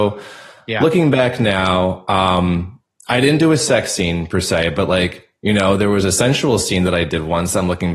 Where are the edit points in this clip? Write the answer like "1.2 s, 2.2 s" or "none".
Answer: none